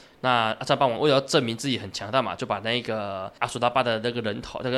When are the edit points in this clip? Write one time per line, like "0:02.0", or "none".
0:03.4